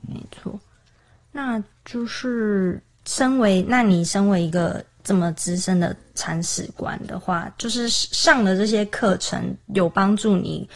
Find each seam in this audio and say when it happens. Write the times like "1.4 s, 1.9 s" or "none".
none